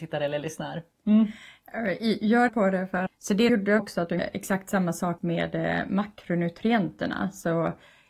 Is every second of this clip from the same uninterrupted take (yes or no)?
no